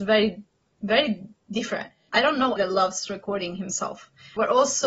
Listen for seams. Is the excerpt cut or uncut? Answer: cut